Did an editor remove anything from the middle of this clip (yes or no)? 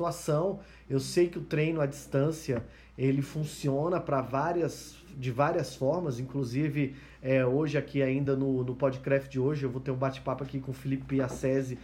no